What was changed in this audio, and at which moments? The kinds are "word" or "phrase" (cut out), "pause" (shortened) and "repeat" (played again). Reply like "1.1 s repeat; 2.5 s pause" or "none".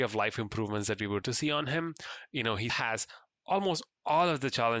1.2 s word; 2.7 s word